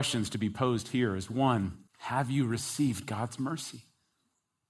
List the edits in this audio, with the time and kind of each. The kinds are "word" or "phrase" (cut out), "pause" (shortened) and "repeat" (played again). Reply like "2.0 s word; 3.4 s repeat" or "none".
1.9 s pause